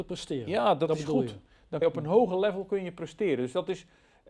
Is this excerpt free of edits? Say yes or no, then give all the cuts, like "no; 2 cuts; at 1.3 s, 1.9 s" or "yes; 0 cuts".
no; 1 cut; at 1.8 s